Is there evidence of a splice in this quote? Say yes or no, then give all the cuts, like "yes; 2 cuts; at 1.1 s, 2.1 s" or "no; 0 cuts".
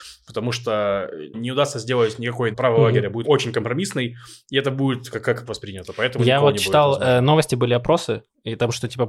yes; 4 cuts; at 1.3 s, 2.5 s, 3.2 s, 5.5 s